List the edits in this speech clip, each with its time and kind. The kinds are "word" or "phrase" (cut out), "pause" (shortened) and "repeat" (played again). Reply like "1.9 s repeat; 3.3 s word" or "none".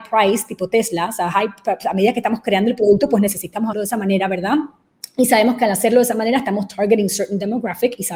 3.7 s word